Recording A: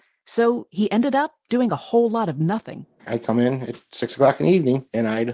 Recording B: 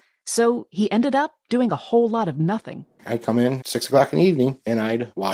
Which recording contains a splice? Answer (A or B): B